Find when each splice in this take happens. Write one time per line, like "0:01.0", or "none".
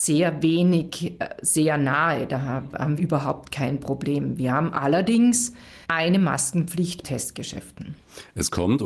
0:03.0
0:05.8
0:07.0